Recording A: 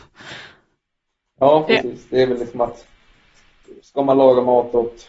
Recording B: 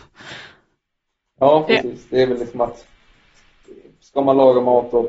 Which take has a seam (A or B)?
A